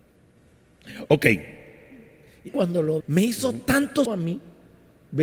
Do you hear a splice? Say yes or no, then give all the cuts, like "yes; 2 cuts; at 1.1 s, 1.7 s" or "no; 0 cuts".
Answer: yes; 3 cuts; at 2.5 s, 3.0 s, 4.1 s